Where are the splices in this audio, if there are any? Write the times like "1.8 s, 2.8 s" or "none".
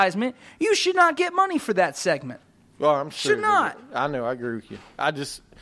none